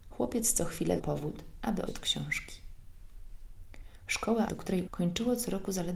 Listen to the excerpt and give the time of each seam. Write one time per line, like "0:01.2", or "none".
0:01.0
0:01.9
0:04.5
0:04.9